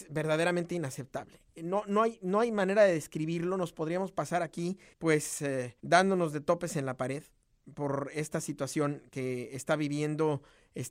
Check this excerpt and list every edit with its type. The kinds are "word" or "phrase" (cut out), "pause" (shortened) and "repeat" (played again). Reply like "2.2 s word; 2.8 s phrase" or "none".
4.9 s pause; 5.8 s pause